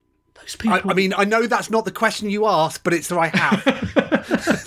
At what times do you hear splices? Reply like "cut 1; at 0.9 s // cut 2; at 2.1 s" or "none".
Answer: cut 1; at 1.2 s // cut 2; at 3.1 s